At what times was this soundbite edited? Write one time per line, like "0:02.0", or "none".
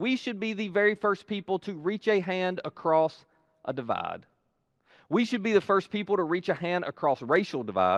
none

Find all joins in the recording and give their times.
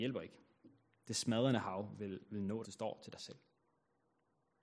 0:02.6

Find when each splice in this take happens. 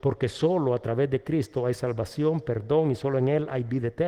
none

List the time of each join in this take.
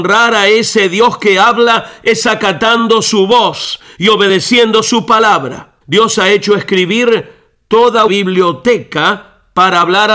0:05.8
0:08.1

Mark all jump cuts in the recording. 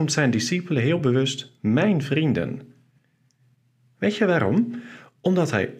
none

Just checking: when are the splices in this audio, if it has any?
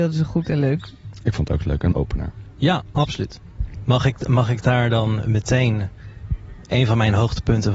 0:01.9

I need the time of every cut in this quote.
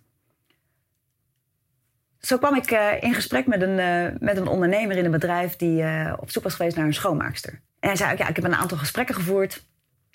0:07.7

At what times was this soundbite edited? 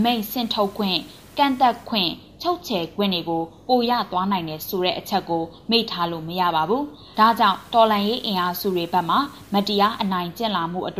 0:07.1

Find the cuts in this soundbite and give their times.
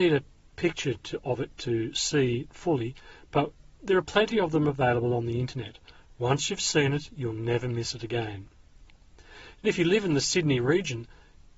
0:08.9

